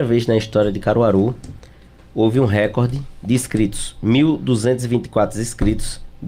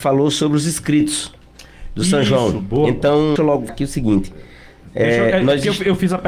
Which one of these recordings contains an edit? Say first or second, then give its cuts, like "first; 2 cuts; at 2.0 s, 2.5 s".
second; 2 cuts; at 3.4 s, 3.7 s